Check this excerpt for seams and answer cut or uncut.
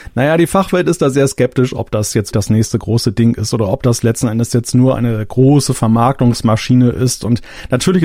cut